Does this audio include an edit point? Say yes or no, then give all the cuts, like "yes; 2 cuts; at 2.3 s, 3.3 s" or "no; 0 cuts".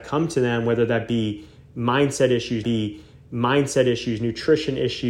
yes; 1 cut; at 2.6 s